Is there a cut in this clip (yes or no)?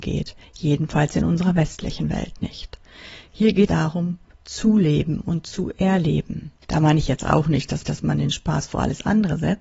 yes